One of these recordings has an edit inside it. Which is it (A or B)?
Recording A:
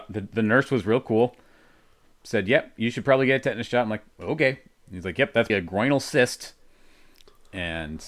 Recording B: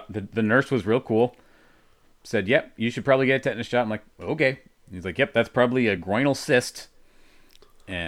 A